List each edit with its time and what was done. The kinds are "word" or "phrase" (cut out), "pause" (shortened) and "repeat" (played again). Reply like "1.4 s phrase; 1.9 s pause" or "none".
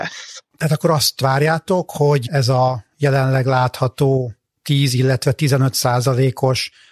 none